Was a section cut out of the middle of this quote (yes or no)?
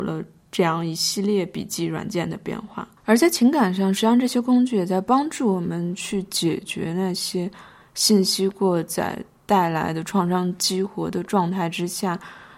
yes